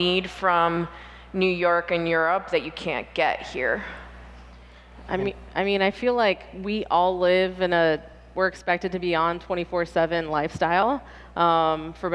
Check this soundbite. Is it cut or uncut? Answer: uncut